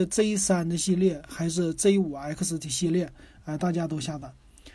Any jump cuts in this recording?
no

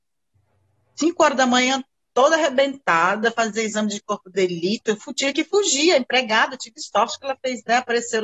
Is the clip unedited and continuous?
yes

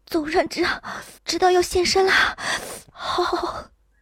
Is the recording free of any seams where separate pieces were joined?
no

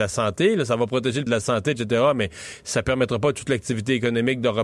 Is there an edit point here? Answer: yes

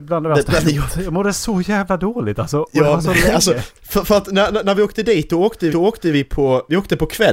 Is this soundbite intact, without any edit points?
no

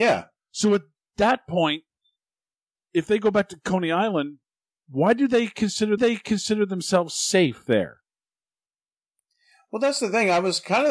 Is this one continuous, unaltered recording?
no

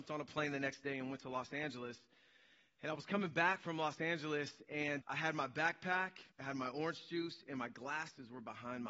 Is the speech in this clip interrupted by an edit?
yes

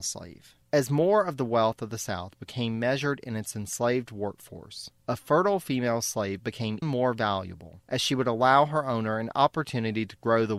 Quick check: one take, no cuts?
no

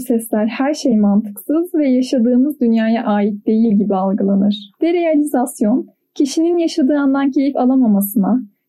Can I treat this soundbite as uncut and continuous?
yes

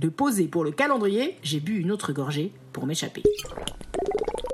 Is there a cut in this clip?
no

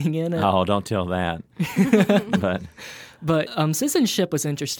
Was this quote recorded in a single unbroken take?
no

